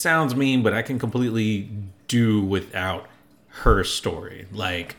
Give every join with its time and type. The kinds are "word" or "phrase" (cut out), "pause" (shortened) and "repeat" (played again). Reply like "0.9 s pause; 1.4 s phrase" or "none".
none